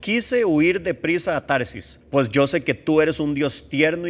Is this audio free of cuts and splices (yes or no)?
no